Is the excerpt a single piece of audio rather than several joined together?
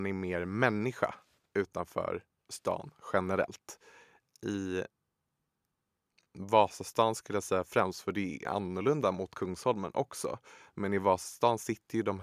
yes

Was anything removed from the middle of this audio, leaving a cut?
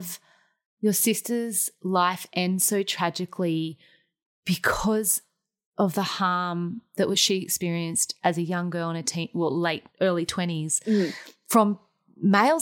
yes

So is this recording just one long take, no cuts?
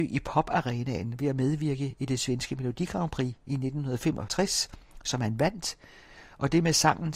yes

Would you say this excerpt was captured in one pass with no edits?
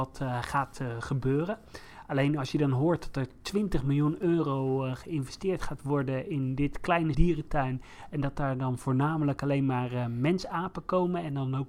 no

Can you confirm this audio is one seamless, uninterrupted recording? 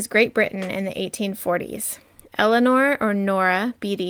yes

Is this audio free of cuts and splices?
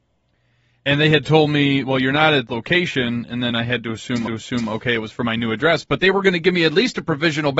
no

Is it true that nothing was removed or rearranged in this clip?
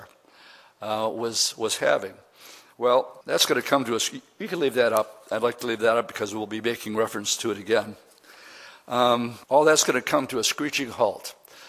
no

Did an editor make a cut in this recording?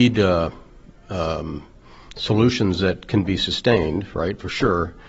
no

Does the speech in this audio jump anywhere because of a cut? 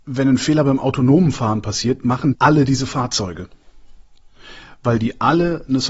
yes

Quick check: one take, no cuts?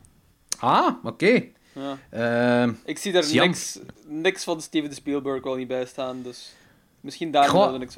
yes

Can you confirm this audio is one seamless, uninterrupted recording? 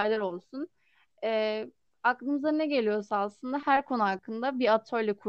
yes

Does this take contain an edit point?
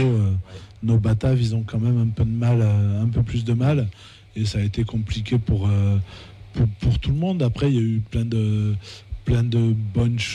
no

